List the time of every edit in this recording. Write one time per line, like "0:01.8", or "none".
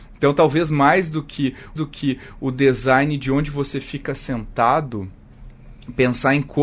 0:01.8